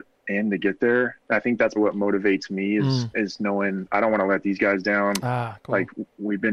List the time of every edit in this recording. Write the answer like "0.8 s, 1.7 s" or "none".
1.2 s, 1.8 s